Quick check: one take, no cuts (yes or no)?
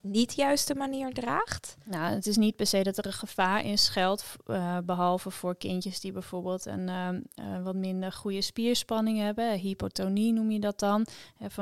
yes